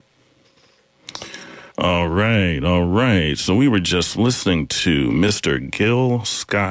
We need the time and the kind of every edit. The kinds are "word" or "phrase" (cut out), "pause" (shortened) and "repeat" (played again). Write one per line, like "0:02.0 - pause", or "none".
0:01.7 - pause